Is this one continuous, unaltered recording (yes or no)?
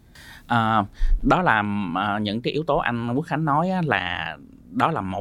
yes